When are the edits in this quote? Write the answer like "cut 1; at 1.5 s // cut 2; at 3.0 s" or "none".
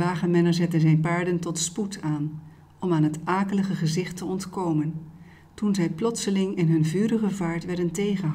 none